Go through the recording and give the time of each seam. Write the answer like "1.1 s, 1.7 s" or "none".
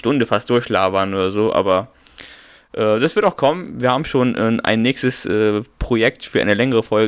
none